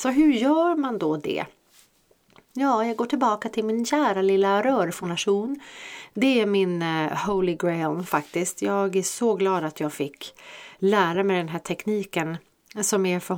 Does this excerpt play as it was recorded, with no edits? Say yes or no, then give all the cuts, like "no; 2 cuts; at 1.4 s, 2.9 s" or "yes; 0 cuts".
yes; 0 cuts